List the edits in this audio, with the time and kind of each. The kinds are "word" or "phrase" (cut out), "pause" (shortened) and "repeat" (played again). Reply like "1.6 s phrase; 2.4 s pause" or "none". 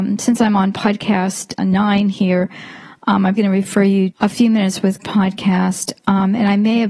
1.6 s word; 3.4 s word; 4.1 s word; 5.0 s word